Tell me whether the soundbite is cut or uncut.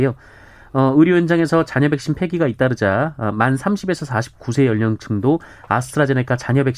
uncut